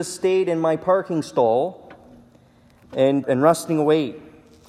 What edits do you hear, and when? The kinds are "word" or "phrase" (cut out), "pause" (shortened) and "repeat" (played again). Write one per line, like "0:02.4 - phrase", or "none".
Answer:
0:03.2 - word